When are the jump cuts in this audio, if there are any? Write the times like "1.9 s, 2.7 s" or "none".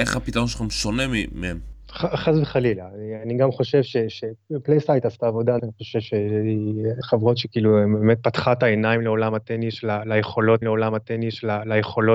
1.8 s, 5.6 s, 7.0 s, 10.6 s